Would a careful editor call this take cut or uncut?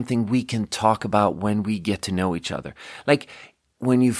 uncut